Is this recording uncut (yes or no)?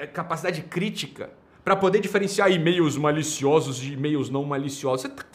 yes